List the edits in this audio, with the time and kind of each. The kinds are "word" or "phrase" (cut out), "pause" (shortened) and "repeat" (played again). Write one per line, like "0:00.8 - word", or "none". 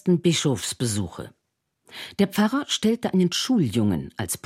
none